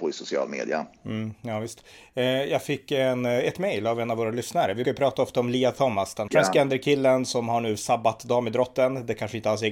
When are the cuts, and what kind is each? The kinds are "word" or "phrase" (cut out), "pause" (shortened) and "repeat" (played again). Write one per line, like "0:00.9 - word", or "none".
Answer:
0:04.8 - word
0:06.3 - word